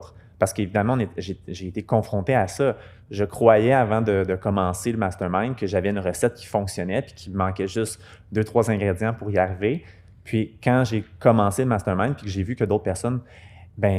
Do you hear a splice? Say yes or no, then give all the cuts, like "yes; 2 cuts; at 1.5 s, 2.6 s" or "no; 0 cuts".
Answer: no; 0 cuts